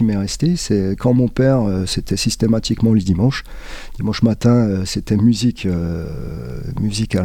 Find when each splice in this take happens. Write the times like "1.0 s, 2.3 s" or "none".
none